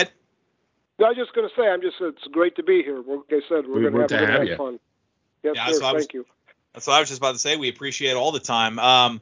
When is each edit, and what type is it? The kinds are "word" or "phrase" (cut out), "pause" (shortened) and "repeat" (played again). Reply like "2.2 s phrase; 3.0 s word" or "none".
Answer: 3.3 s word; 4.1 s word